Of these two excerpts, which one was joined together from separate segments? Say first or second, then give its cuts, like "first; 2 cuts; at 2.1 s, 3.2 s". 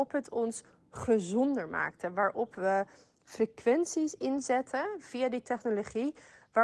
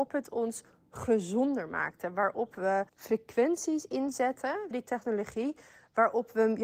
second; 2 cuts; at 2.9 s, 4.7 s